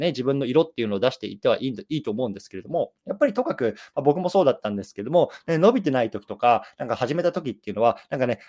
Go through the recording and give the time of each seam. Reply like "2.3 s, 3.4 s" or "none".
3.0 s